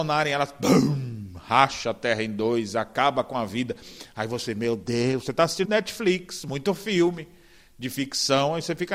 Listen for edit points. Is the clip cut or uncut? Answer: cut